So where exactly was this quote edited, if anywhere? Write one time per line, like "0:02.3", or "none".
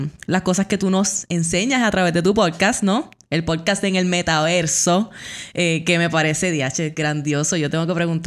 none